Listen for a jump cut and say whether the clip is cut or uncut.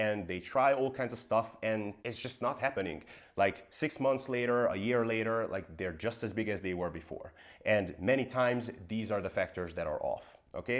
cut